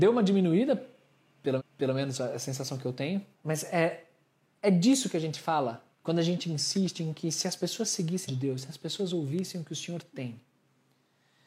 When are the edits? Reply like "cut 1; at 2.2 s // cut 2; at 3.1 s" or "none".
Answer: cut 1; at 1.6 s // cut 2; at 3.3 s // cut 3; at 5.9 s // cut 4; at 8.3 s